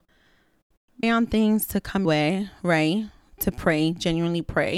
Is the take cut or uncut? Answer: cut